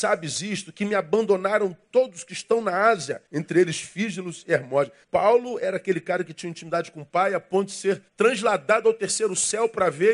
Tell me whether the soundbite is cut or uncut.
cut